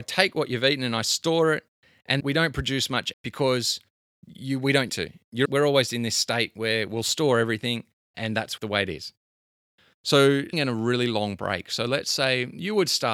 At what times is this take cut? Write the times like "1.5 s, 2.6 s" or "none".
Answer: 2.2 s, 3.1 s, 4.9 s, 5.4 s, 5.9 s, 8.1 s, 8.6 s, 10.5 s